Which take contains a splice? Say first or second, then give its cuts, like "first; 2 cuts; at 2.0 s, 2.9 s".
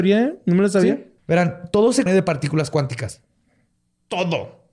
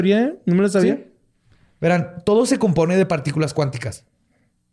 first; 2 cuts; at 1.2 s, 2.1 s